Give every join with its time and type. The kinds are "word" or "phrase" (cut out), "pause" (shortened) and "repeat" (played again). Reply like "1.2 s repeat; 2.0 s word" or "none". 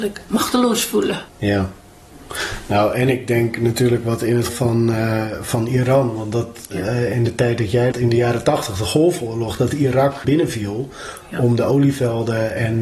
1.3 s pause; 4.5 s word; 7.9 s phrase; 10.2 s phrase

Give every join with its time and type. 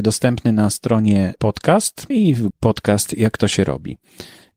1.4 s word; 2.1 s word; 2.5 s word

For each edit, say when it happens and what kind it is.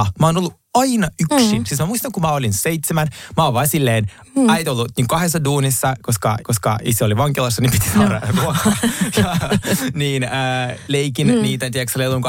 6.4 s repeat; 10.9 s phrase

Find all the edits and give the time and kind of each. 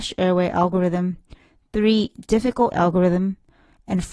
2.7 s word

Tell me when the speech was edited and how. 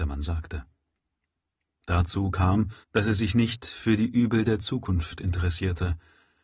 2.8 s pause

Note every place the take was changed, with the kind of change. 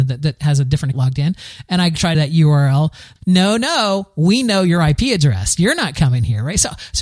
0.9 s word; 2.1 s phrase; 3.2 s word

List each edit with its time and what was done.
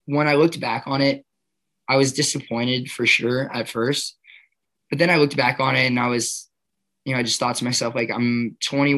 none

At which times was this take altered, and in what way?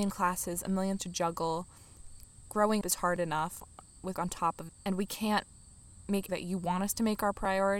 1.0 s word; 2.8 s word; 4.1 s word; 4.7 s word; 6.3 s word

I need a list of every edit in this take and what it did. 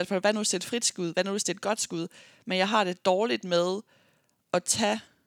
none

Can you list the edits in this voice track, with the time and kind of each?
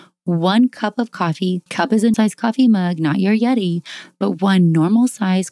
1.7 s pause; 2.1 s word

